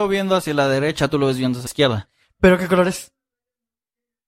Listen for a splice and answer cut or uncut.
cut